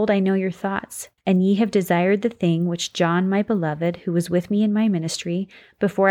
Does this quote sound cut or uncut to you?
cut